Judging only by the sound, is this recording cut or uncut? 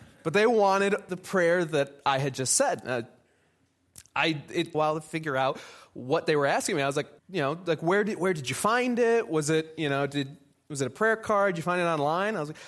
cut